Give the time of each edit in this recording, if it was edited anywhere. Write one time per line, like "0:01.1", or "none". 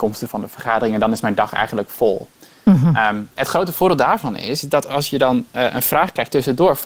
0:03.4

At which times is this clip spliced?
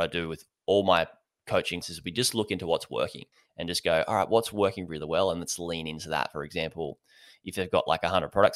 0:01.8
0:03.3
0:04.9

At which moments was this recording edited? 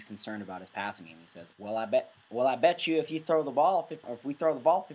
0:01.5
0:04.0

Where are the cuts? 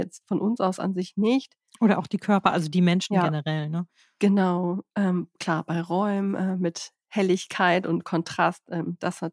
none

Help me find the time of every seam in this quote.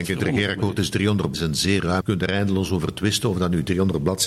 0:01.3
0:02.0

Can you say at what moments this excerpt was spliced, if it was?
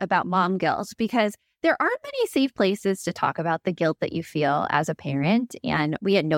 none

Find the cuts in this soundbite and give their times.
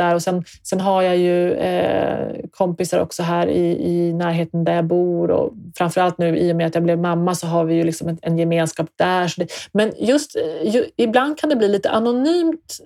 none

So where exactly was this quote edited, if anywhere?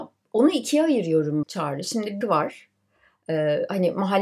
0:01.4
0:02.2

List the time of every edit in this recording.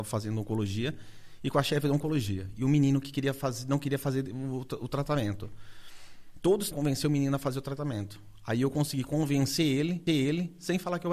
0:06.7
0:10.1

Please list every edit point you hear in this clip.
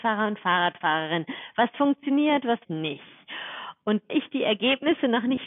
0:02.6
0:04.1

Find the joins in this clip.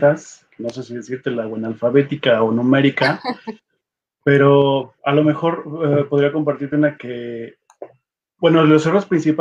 0:05.0
0:07.0

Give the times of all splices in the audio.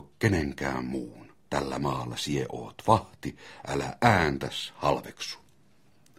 0:01.4

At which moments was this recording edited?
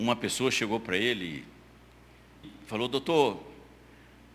0:02.4

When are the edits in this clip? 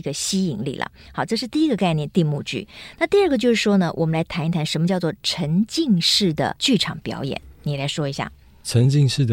none

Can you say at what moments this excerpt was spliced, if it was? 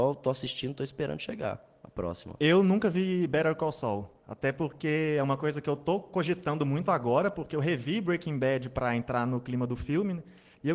0:04.2

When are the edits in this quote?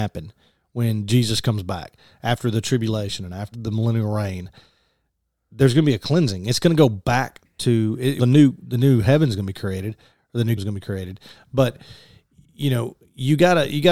0:03.5
0:08.2
0:10.6

